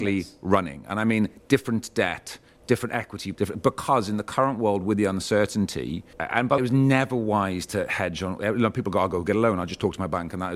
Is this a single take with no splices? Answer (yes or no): no